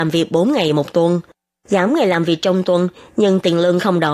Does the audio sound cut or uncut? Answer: uncut